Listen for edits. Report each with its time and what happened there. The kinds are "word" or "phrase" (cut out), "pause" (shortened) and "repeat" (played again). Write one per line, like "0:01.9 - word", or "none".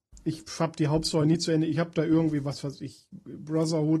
none